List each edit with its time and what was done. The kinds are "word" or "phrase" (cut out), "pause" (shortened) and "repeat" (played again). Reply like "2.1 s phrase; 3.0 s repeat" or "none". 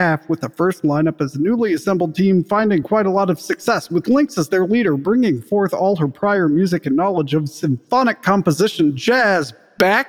none